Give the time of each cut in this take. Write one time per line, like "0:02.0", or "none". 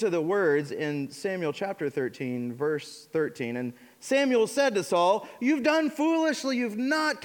none